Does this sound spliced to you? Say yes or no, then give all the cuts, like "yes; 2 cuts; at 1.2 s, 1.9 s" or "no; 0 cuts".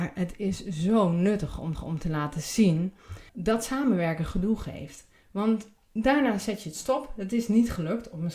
yes; 2 cuts; at 1.7 s, 3.3 s